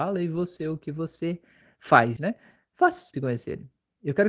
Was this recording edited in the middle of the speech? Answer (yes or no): yes